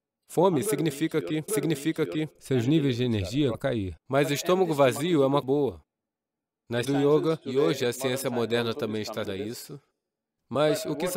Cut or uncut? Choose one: cut